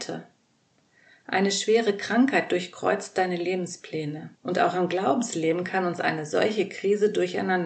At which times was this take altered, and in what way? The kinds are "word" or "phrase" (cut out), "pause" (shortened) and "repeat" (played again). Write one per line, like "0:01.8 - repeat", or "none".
0:04.4 - pause